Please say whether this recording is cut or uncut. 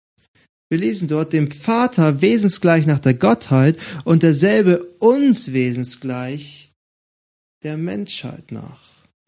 uncut